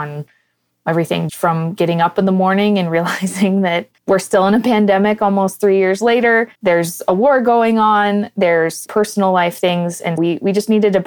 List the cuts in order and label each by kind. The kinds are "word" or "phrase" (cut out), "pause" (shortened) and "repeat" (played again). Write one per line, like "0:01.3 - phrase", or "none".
0:01.3 - word
0:04.0 - pause
0:06.6 - pause
0:10.2 - word